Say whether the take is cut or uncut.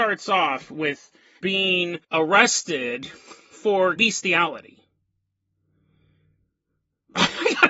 cut